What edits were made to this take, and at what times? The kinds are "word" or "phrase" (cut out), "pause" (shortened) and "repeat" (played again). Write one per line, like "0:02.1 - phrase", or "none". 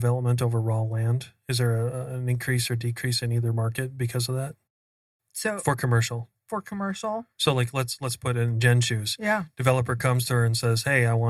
none